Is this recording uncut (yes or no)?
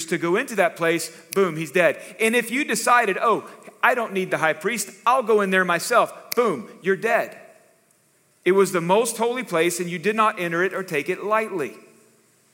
yes